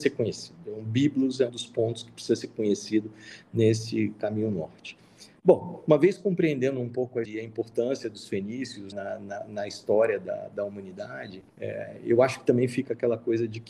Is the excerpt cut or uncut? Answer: cut